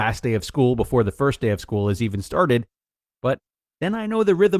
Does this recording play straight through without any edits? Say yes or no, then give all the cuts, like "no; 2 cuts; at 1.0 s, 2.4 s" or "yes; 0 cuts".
yes; 0 cuts